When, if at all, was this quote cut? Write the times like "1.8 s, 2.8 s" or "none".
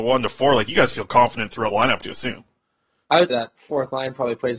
1.7 s, 2.0 s, 3.3 s